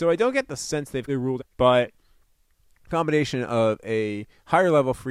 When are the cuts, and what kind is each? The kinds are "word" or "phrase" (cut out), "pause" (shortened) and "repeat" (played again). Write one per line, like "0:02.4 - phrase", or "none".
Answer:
0:01.1 - word
0:01.4 - phrase